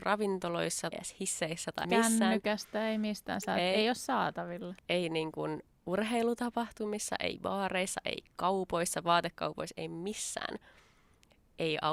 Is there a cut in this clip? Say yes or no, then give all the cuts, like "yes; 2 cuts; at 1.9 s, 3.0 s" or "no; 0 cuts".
yes; 3 cuts; at 0.9 s, 1.8 s, 4.8 s